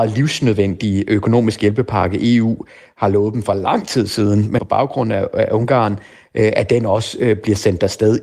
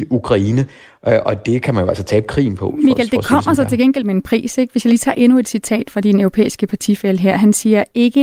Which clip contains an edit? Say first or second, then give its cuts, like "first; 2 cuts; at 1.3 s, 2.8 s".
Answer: first; 1 cut; at 4.6 s